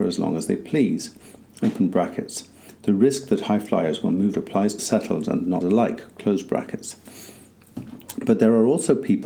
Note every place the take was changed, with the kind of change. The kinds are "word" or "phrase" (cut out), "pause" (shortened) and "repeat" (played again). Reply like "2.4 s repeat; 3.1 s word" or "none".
4.3 s word; 4.8 s word; 5.6 s word